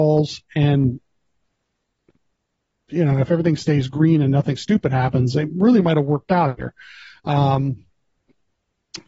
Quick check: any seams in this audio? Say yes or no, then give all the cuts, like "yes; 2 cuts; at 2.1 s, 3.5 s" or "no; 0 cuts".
no; 0 cuts